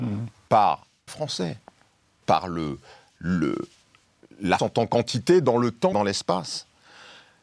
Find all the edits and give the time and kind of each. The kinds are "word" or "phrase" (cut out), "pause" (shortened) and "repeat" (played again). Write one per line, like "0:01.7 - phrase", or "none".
0:01.1 - word
0:02.2 - word
0:04.6 - word
0:05.9 - word